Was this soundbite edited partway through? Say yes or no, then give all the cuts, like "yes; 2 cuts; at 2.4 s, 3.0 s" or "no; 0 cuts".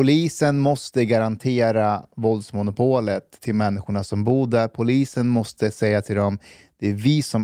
no; 0 cuts